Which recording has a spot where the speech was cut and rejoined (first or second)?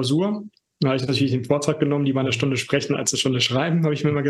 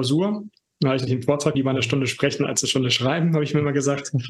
second